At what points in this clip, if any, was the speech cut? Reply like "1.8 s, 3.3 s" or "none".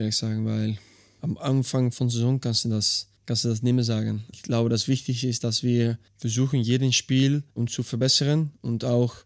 3.2 s, 6.1 s, 7.5 s